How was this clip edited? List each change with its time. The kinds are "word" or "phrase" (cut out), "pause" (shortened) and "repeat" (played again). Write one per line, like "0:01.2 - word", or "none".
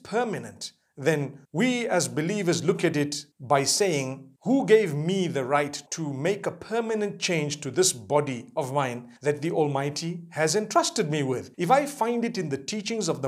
0:01.4 - pause
0:03.3 - pause
0:04.4 - pause
0:05.9 - pause
0:09.2 - pause
0:11.5 - pause